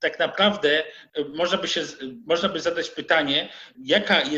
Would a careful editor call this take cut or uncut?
uncut